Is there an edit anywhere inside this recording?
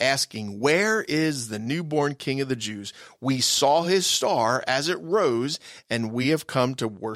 no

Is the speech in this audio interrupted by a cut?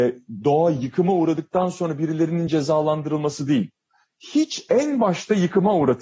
no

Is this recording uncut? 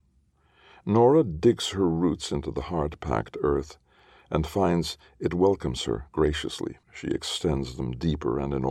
no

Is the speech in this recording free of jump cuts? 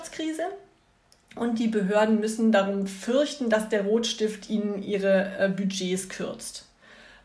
yes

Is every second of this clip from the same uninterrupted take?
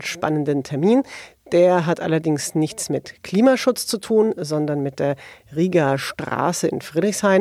yes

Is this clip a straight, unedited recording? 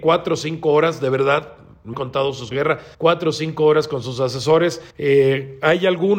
no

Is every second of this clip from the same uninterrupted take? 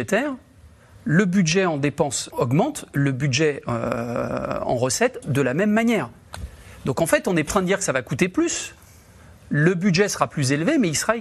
no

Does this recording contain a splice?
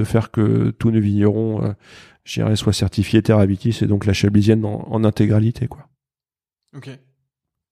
no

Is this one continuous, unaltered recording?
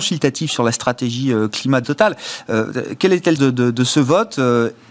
no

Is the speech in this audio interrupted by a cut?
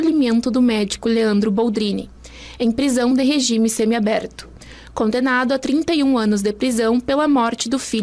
no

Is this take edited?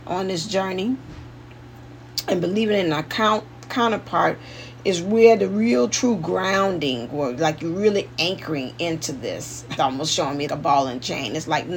yes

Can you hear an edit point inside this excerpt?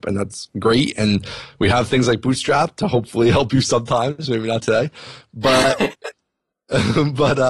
no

